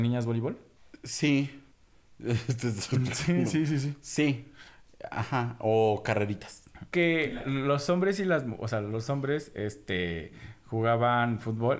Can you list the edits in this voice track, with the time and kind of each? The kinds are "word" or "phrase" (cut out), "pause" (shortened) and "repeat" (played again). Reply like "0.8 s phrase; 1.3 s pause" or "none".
1.7 s pause